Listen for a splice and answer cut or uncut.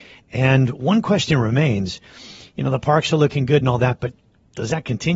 uncut